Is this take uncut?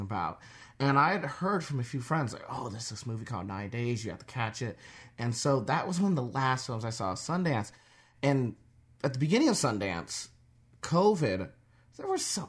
yes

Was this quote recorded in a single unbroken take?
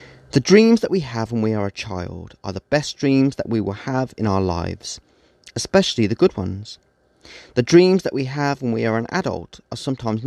yes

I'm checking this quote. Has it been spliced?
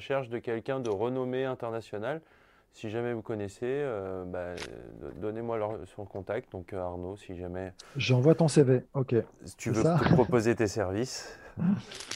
no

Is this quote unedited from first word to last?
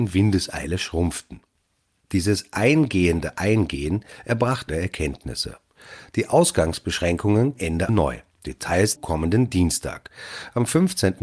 no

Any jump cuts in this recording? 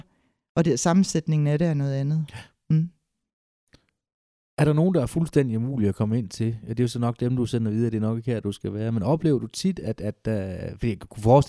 no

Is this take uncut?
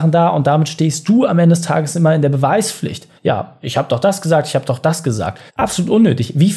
no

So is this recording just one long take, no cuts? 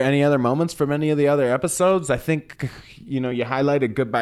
yes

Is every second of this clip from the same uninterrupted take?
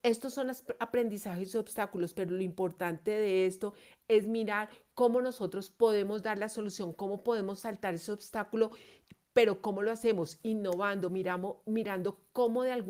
yes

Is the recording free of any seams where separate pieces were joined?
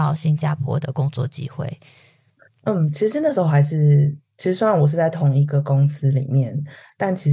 yes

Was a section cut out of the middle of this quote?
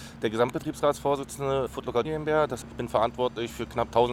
yes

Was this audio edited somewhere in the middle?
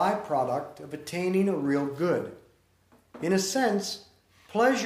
no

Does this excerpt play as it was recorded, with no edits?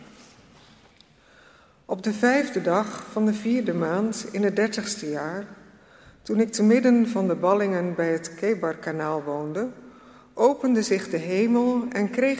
yes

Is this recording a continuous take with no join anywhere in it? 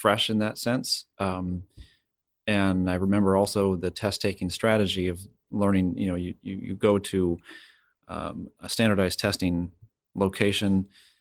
yes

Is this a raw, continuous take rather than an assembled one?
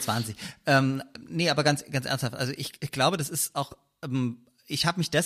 yes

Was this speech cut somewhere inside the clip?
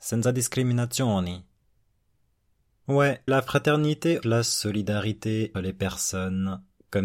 yes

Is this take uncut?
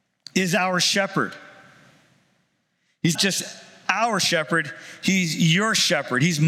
no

